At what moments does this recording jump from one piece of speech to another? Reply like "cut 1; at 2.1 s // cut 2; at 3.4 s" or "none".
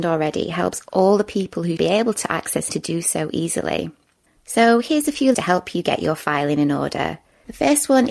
cut 1; at 1.8 s // cut 2; at 2.7 s // cut 3; at 5.3 s